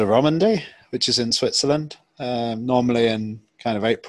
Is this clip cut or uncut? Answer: uncut